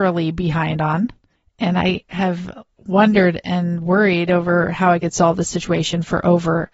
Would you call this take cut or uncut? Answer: uncut